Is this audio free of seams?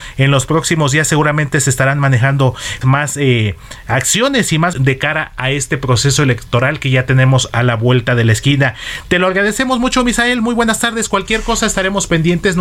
no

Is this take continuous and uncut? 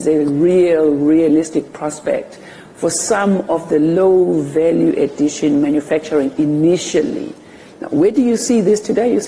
yes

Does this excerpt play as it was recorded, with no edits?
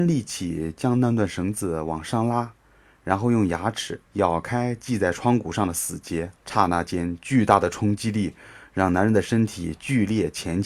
no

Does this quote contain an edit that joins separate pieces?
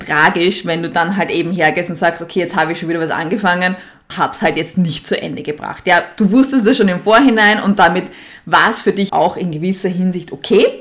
yes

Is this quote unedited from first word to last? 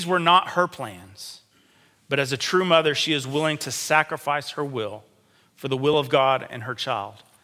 yes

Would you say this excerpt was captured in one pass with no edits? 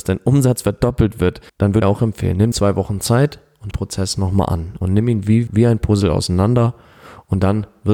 no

